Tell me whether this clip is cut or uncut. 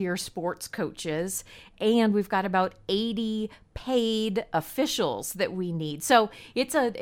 uncut